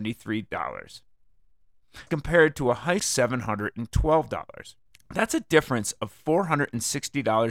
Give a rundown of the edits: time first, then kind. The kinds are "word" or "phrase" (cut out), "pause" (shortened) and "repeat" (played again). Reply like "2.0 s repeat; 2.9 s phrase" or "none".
2.1 s word; 3.0 s phrase; 4.8 s pause